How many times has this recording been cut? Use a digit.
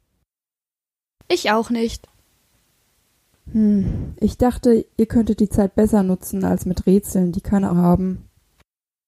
1